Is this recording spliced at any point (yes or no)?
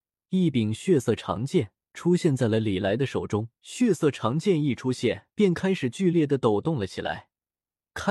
yes